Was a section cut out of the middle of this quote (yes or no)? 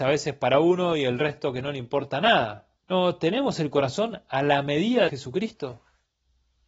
yes